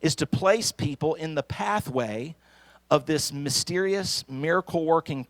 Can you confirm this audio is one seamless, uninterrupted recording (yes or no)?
yes